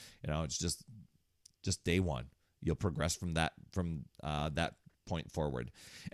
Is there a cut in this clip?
no; 0 cuts

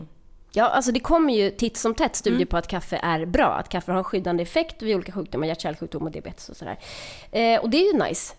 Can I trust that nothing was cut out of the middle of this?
yes; 0 cuts

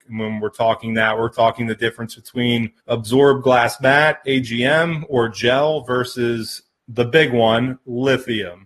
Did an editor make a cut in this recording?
yes; 1 cut; at 2.8 s

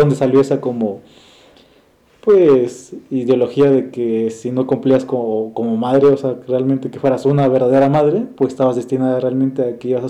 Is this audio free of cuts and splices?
yes; 0 cuts

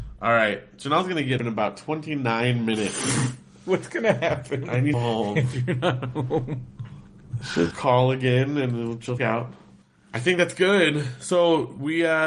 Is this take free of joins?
no; 5 cuts; at 1.4 s, 4.9 s, 7.7 s, 9.2 s, 9.8 s

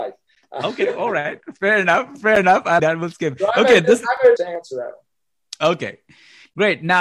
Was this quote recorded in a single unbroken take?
no; 2 cuts; at 2.8 s, 4.4 s

